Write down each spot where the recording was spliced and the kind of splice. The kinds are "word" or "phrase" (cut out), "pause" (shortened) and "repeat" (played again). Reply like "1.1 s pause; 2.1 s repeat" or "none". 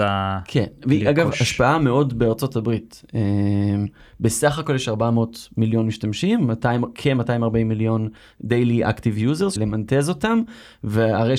9.6 s word